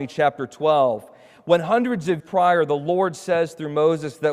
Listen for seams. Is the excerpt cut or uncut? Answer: cut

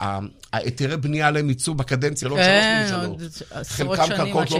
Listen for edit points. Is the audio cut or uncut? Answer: cut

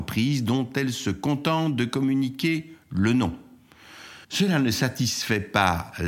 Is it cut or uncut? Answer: cut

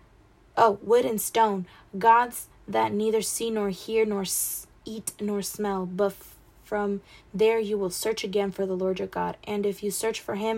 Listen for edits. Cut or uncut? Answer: uncut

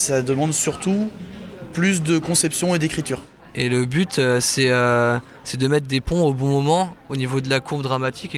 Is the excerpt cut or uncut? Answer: uncut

